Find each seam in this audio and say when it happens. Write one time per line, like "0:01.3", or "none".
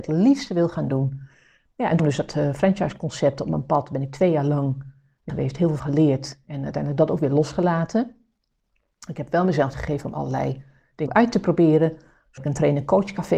0:02.0
0:05.3
0:05.8
0:09.7
0:11.1
0:12.4